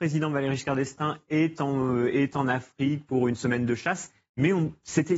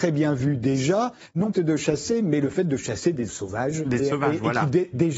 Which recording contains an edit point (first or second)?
second